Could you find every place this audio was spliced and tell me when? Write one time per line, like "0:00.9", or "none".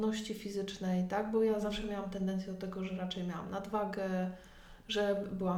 none